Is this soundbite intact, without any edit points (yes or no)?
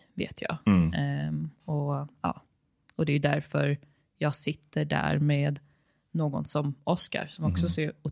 yes